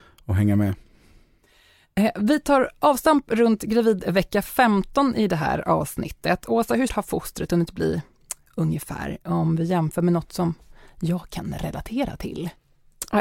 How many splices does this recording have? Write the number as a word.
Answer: one